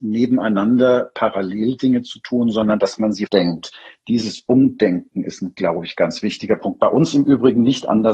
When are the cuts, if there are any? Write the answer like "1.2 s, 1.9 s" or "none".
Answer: 3.3 s